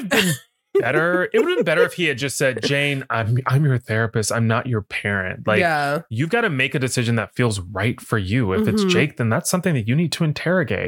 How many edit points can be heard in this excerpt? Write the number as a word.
zero